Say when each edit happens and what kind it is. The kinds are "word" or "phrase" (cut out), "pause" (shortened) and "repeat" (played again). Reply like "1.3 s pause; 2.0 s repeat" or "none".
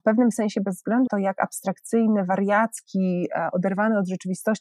1.1 s word